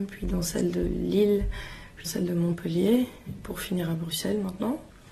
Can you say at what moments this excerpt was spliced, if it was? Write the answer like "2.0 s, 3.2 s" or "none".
2.1 s